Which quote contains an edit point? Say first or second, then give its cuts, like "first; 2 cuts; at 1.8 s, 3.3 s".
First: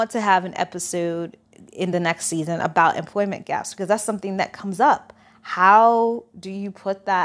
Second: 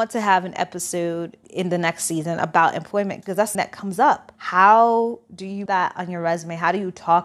second; 5 cuts; at 1.4 s, 3.2 s, 3.5 s, 4.3 s, 5.7 s